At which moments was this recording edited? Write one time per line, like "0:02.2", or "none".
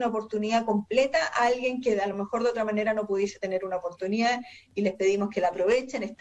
none